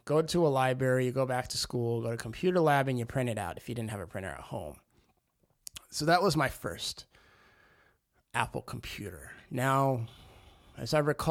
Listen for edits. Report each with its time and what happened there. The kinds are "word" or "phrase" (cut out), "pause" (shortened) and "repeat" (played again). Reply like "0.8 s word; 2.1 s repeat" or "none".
none